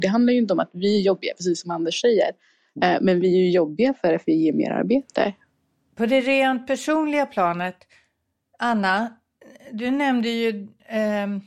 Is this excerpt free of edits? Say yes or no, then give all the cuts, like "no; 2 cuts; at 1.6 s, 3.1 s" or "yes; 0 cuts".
yes; 0 cuts